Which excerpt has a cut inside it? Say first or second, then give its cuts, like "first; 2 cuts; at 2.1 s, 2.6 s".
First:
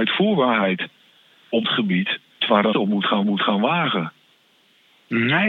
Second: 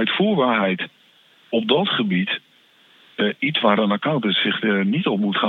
first; 4 cuts; at 1.6 s, 2.4 s, 2.7 s, 3.2 s